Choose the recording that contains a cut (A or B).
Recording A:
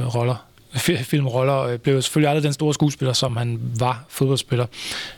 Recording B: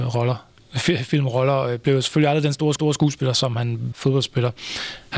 B